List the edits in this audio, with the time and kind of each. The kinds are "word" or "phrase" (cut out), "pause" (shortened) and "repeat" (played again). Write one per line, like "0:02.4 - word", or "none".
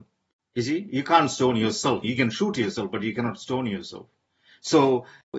0:02.0 - word

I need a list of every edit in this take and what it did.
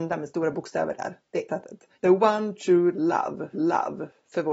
0:01.5 - phrase
0:02.0 - pause
0:03.5 - repeat

